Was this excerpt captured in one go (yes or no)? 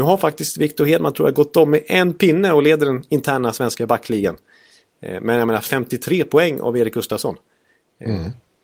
yes